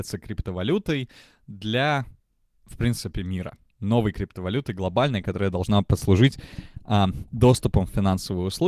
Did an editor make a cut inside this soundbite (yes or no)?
no